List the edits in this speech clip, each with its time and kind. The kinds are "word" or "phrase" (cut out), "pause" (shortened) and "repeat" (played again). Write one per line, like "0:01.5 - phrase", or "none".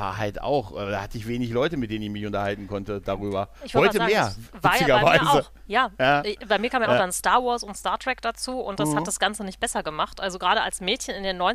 0:03.5 - pause